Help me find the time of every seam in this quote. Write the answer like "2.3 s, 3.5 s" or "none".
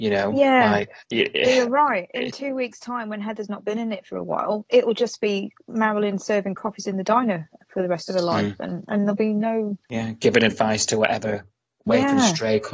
1.0 s, 9.8 s